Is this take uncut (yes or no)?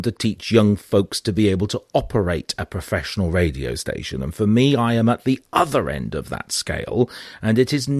yes